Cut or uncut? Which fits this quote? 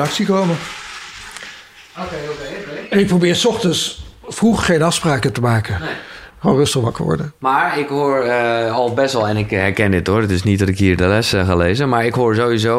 uncut